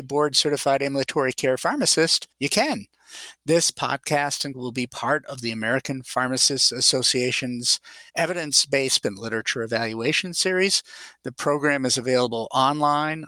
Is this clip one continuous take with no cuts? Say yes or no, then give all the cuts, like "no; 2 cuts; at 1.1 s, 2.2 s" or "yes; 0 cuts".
no; 4 cuts; at 2.3 s, 4.5 s, 8.1 s, 9.0 s